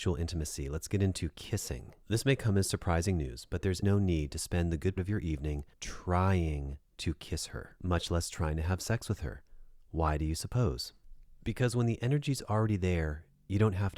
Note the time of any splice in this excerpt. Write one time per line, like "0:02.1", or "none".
0:03.8
0:05.0
0:05.7